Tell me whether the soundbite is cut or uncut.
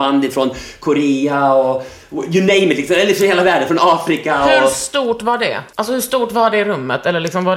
cut